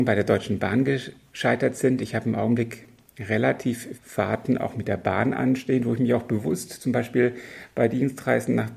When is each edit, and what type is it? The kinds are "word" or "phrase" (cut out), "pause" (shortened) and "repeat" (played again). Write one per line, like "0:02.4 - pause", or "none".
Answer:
0:04.0 - word